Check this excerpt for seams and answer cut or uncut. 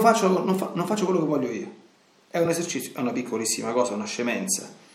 uncut